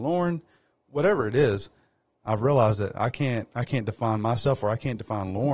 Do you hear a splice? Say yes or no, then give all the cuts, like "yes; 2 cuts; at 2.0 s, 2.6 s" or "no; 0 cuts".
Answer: no; 0 cuts